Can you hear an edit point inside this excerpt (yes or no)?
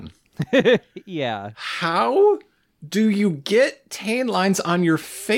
no